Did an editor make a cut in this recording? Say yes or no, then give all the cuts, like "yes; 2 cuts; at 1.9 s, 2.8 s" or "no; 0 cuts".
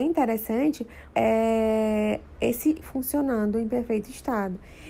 yes; 2 cuts; at 1.1 s, 2.8 s